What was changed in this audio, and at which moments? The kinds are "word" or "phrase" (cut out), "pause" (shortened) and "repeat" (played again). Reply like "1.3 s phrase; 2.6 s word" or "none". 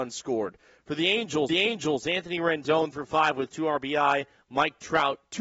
1.5 s repeat; 2.9 s word